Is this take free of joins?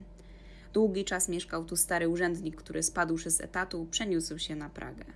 no; 1 cut; at 2.5 s

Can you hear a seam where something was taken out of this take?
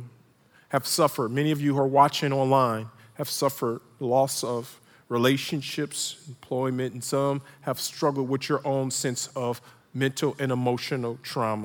no; 0 cuts

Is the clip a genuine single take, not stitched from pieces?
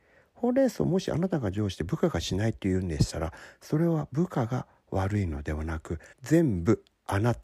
no; 1 cut; at 6.1 s

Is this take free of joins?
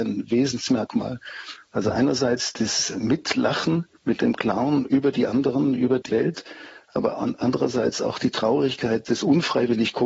no; 2 cuts; at 4.0 s, 6.1 s

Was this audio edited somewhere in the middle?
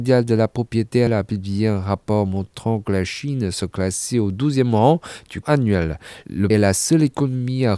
yes; 3 cuts; at 1.1 s, 5.4 s, 6.5 s

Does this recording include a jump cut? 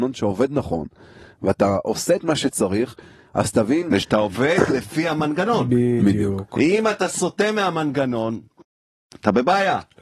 no; 0 cuts

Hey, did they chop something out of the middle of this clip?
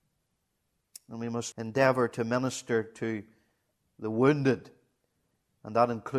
yes; 1 cut; at 1.5 s

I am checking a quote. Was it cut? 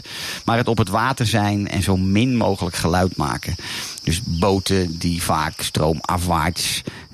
no; 0 cuts

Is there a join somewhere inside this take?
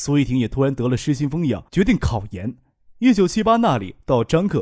yes; 1 cut; at 1.7 s

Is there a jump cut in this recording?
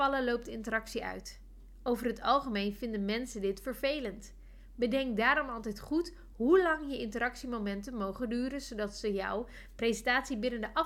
no; 0 cuts

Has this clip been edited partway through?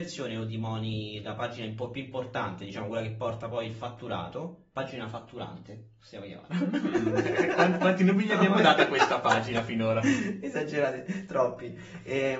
no; 0 cuts

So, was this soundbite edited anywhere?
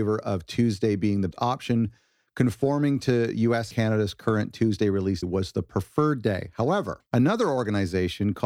yes; 4 cuts; at 1.3 s, 3.7 s, 5.2 s, 7.1 s

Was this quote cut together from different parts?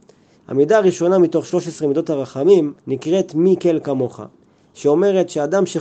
yes; 1 cut; at 2.8 s

